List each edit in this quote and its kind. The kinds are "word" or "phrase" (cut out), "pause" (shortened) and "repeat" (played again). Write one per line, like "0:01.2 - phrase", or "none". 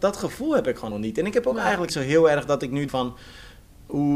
0:00.9 - word
0:01.9 - phrase
0:02.9 - word